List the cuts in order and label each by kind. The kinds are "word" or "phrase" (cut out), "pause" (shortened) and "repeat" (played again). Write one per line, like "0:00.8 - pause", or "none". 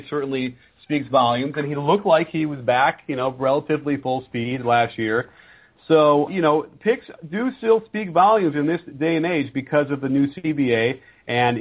0:06.3 - word